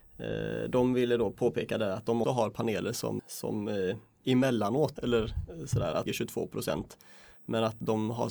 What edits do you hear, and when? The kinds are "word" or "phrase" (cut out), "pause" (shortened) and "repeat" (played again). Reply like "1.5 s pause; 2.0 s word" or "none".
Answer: 2.2 s word; 3.2 s word; 5.0 s phrase; 6.1 s phrase